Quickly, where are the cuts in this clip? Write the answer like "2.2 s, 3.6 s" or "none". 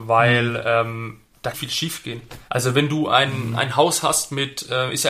1.5 s, 2.5 s